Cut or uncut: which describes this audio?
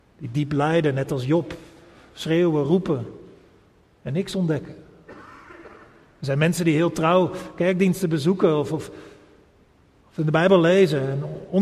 uncut